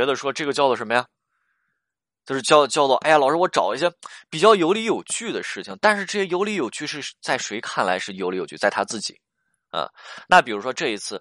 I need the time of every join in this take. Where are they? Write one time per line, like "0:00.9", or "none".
none